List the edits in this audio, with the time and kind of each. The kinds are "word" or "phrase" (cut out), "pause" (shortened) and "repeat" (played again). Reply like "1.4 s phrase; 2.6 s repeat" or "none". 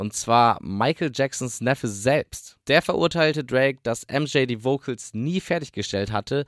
2.6 s pause